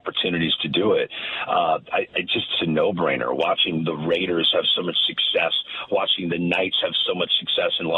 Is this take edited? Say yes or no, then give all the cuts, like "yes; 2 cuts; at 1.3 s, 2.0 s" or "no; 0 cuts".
yes; 1 cut; at 2.6 s